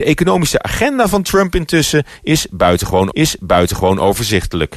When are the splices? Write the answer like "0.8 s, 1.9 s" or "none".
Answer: 3.1 s